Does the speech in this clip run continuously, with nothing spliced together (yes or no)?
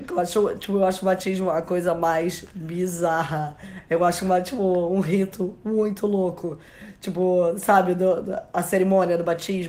yes